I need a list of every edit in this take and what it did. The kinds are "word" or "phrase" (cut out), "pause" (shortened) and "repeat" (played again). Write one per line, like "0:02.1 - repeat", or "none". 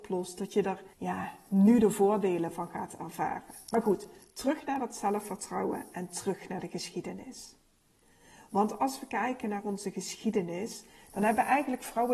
0:00.9 - pause